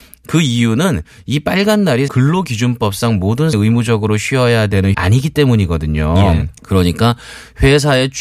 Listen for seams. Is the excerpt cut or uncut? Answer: cut